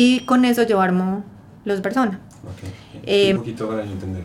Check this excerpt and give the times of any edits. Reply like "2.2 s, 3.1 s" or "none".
1.8 s, 3.4 s